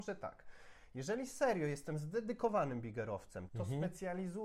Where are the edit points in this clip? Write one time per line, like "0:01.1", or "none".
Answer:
0:03.5